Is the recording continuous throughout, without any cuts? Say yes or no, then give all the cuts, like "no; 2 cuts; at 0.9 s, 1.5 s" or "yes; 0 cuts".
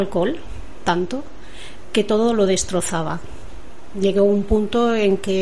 yes; 0 cuts